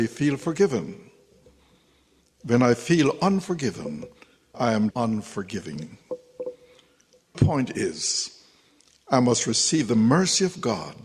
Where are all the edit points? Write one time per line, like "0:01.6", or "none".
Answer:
0:04.5
0:04.9
0:07.3